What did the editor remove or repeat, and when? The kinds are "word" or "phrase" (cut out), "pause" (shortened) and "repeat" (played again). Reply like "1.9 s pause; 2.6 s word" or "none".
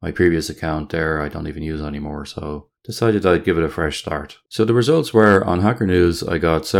2.8 s pause; 4.5 s pause